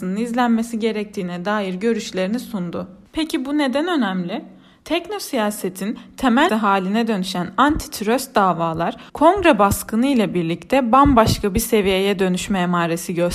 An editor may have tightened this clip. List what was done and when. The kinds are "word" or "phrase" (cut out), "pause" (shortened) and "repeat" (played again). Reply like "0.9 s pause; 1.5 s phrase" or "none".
6.5 s word; 9.1 s pause